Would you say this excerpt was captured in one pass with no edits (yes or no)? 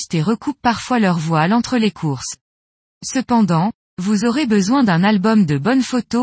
yes